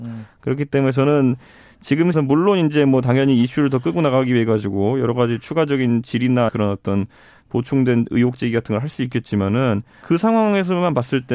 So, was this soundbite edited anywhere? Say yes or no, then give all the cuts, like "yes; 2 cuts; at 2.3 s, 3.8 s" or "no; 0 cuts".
yes; 3 cuts; at 2.1 s, 6.5 s, 10.0 s